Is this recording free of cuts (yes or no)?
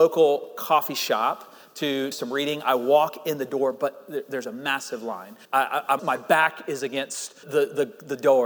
no